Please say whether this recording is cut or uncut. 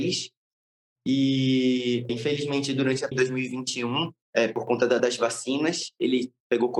cut